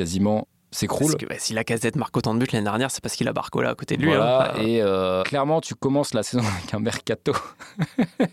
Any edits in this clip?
no; 0 cuts

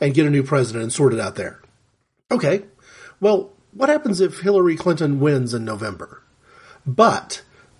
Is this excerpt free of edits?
yes; 0 cuts

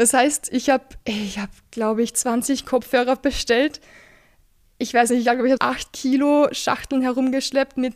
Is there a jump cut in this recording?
yes; 1 cut; at 5.6 s

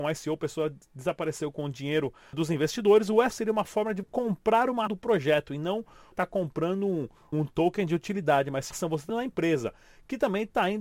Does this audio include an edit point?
yes; 8 cuts; at 2.3 s, 3.3 s, 4.0 s, 4.9 s, 6.1 s, 7.3 s, 8.7 s, 9.1 s

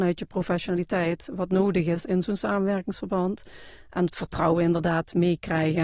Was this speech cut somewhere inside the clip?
no; 0 cuts

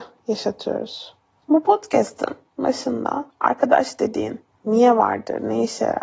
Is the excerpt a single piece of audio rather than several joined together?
yes; 0 cuts

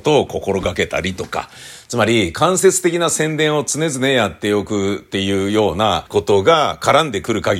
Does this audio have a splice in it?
yes; 1 cut; at 6.1 s

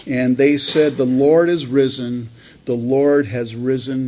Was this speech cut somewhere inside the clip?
no; 0 cuts

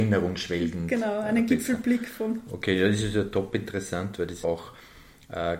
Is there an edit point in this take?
yes; 1 cut; at 4.4 s

